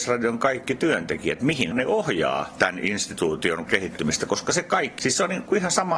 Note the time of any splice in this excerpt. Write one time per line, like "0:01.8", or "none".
0:01.7
0:03.7
0:05.0